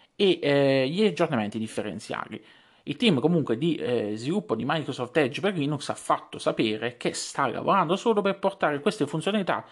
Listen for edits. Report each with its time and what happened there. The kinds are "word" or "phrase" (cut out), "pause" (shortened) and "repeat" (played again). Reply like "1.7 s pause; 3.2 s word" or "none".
none